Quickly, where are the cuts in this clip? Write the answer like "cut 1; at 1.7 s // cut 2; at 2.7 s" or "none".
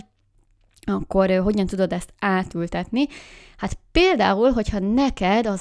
none